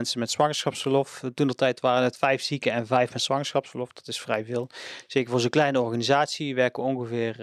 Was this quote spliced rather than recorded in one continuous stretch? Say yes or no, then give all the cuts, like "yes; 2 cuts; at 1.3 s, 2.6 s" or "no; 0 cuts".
no; 0 cuts